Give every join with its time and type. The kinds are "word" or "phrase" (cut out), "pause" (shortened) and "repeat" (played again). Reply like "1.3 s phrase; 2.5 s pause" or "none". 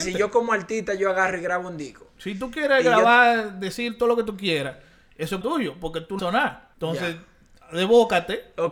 5.4 s word; 6.2 s word; 6.7 s pause